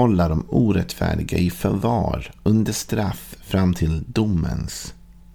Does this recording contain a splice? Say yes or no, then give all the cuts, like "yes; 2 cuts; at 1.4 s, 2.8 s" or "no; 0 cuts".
no; 0 cuts